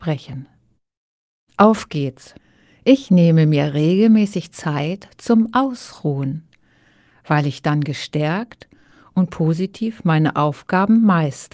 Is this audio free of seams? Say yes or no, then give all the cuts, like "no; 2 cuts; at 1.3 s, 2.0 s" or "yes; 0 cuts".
yes; 0 cuts